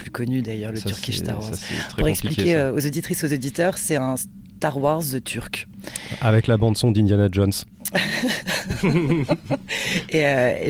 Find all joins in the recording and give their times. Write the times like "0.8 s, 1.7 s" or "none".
none